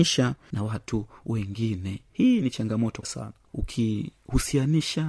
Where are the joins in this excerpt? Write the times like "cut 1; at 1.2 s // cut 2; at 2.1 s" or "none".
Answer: cut 1; at 3.0 s